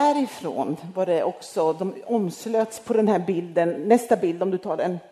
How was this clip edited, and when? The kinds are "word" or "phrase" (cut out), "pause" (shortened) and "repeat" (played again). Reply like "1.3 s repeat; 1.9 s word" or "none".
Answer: none